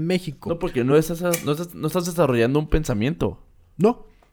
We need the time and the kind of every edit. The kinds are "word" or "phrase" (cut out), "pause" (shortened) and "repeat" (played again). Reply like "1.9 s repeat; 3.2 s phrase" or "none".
none

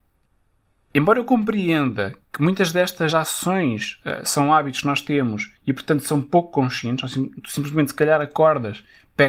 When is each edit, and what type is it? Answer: 5.6 s pause

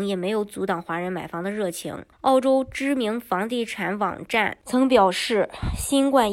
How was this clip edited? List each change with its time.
2.1 s pause

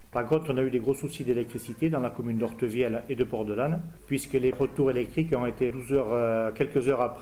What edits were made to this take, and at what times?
4.5 s word; 5.7 s word

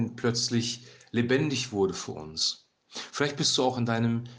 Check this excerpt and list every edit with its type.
none

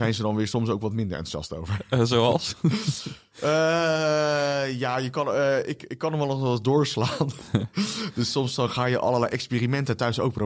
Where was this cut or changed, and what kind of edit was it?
none

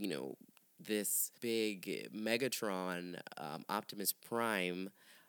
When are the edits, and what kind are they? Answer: 1.4 s pause

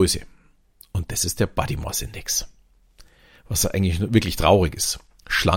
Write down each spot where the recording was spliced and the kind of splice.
none

